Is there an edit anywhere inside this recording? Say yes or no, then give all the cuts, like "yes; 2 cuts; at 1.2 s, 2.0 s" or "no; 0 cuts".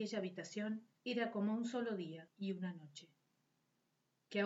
yes; 1 cut; at 1.0 s